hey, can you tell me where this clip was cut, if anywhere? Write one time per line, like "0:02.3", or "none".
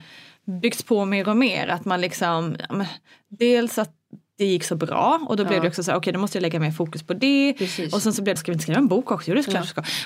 0:08.4